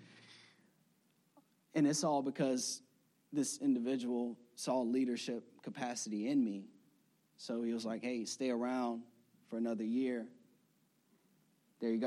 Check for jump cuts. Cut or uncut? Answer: uncut